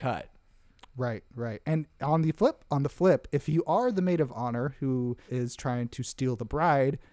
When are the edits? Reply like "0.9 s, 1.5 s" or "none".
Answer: 5.3 s